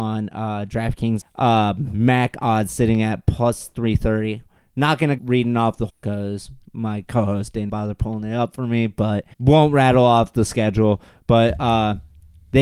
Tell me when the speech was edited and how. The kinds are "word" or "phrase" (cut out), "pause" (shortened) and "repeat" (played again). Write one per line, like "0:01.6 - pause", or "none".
0:01.2 - phrase
0:05.2 - word
0:05.9 - phrase
0:07.7 - word
0:09.3 - pause